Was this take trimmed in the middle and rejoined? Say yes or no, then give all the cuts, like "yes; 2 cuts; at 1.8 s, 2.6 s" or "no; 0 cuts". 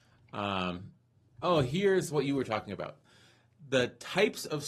no; 0 cuts